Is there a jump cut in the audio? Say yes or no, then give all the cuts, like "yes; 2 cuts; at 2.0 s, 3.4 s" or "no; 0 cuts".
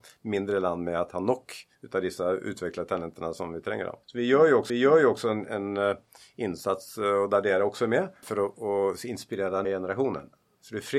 yes; 4 cuts; at 1.7 s, 4.0 s, 4.7 s, 9.6 s